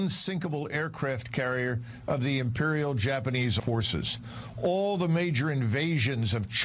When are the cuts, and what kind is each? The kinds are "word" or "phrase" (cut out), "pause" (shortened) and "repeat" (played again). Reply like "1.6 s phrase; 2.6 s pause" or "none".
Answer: 3.6 s word